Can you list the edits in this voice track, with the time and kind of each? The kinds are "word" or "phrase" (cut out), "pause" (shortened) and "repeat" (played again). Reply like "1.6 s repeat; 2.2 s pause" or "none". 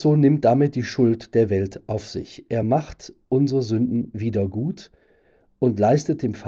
none